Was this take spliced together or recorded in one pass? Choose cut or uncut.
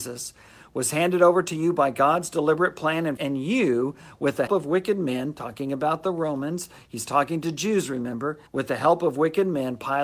cut